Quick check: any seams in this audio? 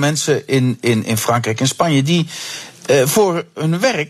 no; 0 cuts

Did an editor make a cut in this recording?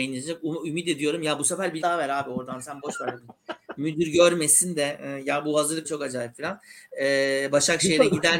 yes; 2 cuts; at 1.8 s, 5.8 s

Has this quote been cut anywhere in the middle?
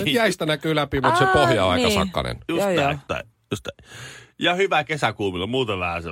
yes; 1 cut; at 3.1 s

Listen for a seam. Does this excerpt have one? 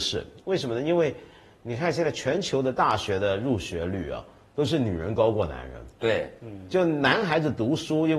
no; 0 cuts

